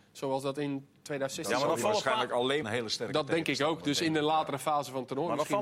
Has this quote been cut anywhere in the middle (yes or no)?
yes